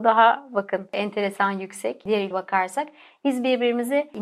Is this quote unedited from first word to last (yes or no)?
no